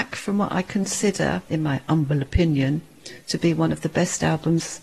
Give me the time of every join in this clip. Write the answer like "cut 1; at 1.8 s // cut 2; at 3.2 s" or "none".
none